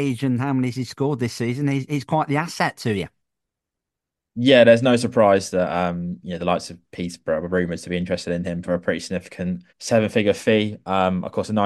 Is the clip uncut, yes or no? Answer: no